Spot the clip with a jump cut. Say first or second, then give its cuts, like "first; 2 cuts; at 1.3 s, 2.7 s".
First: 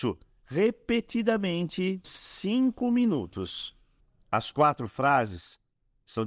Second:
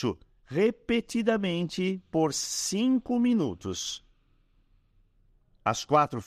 first; 2 cuts; at 2.0 s, 4.0 s